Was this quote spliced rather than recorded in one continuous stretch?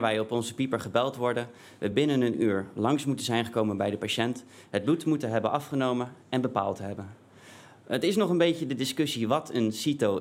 no; 0 cuts

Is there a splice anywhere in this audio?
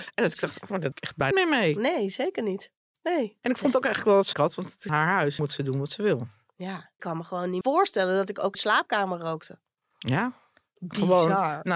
yes; 8 cuts; at 0.9 s, 1.3 s, 4.3 s, 4.9 s, 5.4 s, 7.0 s, 7.6 s, 8.5 s

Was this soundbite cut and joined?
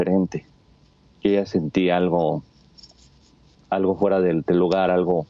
no; 0 cuts

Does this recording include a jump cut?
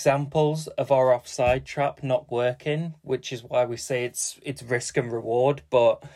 yes; 1 cut; at 2.3 s

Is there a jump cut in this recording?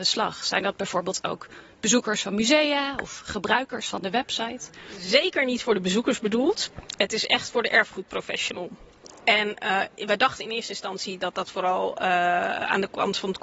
no; 0 cuts

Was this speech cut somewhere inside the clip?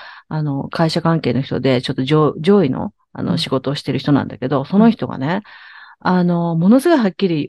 no; 0 cuts

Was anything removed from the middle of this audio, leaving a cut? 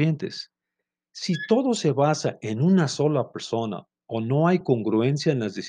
no; 0 cuts

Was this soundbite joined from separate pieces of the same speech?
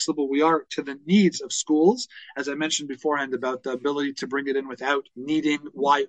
yes; 1 cut; at 5.1 s

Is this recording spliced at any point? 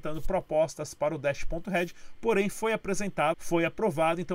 yes; 1 cut; at 3.3 s

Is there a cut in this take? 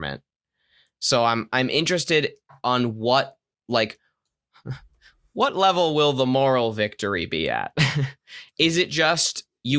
no; 0 cuts

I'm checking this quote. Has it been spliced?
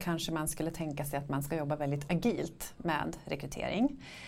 no; 0 cuts

